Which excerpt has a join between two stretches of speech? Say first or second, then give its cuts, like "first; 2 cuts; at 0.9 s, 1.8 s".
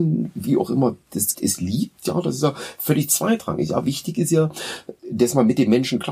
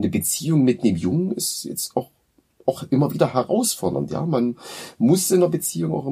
first; 2 cuts; at 1.3 s, 5.0 s